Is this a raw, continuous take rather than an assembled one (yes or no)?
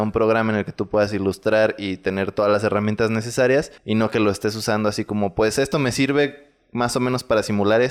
no